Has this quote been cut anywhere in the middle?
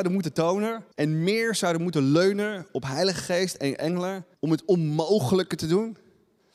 yes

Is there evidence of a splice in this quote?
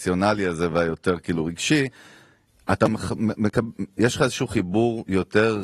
no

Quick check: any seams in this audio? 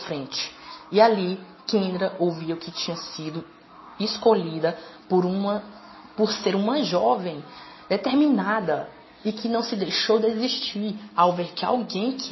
no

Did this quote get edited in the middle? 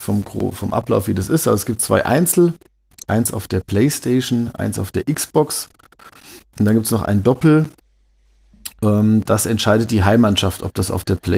no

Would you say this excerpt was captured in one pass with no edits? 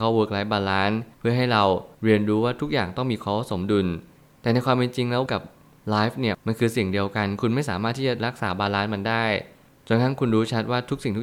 no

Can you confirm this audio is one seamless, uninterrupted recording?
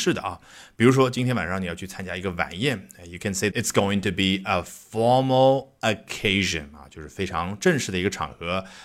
no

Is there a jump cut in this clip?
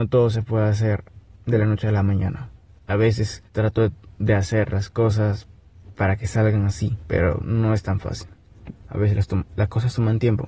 yes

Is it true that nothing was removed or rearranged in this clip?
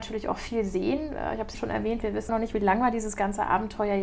no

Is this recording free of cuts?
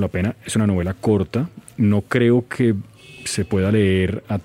yes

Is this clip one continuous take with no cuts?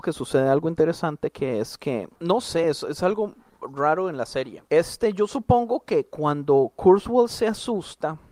yes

